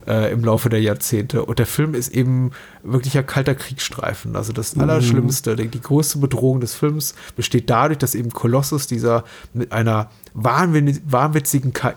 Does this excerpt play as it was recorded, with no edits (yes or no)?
yes